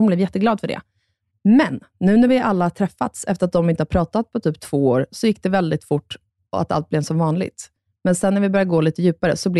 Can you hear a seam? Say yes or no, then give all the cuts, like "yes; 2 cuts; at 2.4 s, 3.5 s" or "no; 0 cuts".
no; 0 cuts